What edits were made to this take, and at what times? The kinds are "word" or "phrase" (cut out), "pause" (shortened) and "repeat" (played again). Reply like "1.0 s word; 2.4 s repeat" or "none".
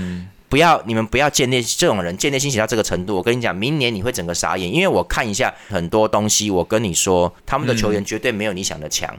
5.7 s word; 7.4 s pause

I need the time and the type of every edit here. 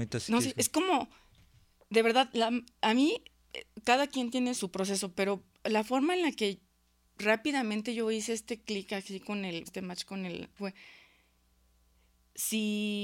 4.5 s word; 5.6 s word; 9.7 s word; 10.6 s word

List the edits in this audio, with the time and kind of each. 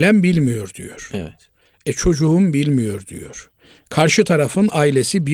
none

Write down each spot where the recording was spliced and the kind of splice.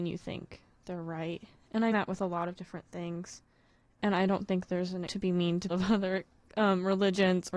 1.9 s word; 5.1 s word; 5.7 s word

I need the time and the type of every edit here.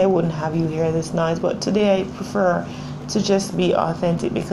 none

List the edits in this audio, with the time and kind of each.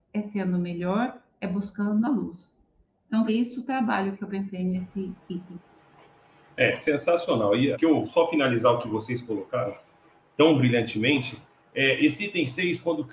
3.3 s word; 7.7 s word

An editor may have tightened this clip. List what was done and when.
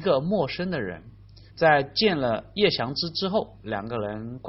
1.5 s pause

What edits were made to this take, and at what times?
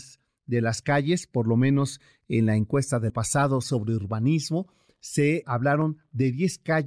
3.1 s word; 5.4 s word

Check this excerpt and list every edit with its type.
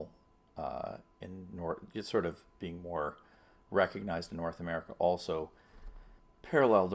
none

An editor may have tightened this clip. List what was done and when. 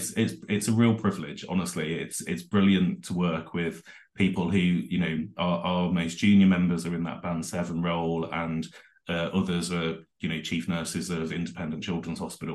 none

